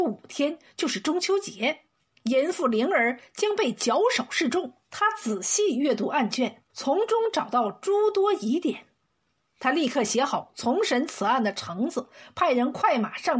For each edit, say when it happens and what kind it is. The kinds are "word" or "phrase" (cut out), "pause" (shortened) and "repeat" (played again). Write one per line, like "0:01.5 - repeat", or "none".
0:02.0 - pause
0:04.8 - pause
0:06.7 - pause